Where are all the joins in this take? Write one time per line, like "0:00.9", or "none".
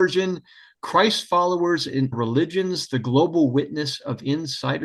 0:02.1